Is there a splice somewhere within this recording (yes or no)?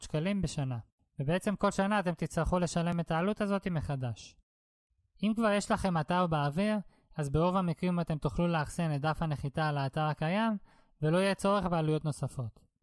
no